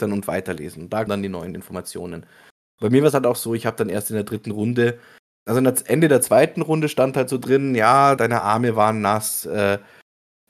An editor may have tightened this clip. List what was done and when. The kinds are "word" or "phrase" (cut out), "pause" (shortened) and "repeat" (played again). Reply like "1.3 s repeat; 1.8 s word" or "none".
1.1 s word; 8.2 s word; 9.4 s word